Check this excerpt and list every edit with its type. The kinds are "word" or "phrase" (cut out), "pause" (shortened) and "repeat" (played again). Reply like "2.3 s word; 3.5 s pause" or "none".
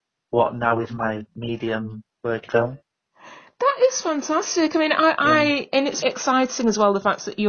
2.5 s word; 6.0 s word